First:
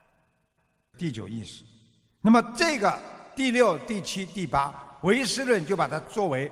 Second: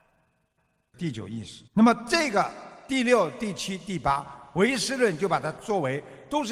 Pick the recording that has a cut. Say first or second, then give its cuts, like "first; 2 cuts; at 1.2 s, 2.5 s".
second; 1 cut; at 1.7 s